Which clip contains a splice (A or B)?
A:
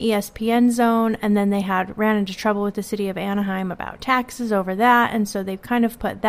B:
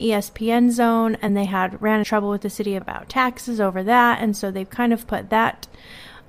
B